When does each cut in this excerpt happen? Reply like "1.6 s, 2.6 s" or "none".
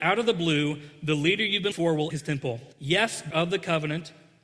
1.7 s, 2.1 s, 2.7 s, 3.3 s